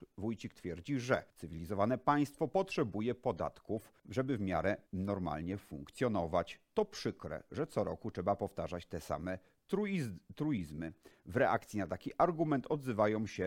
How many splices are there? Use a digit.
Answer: 3